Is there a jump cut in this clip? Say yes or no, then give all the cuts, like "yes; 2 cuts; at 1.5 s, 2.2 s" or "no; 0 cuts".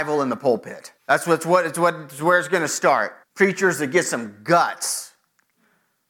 yes; 2 cuts; at 1.0 s, 3.2 s